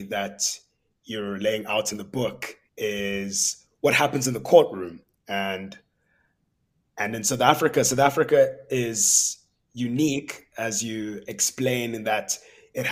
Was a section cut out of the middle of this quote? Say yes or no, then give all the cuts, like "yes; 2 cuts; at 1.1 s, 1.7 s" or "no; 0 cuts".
yes; 1 cut; at 2.7 s